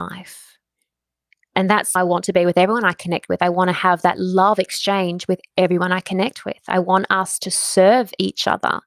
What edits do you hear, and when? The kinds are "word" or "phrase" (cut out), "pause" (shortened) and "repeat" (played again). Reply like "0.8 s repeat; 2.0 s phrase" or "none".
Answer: 2.0 s word